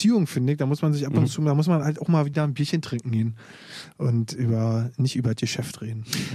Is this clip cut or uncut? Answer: uncut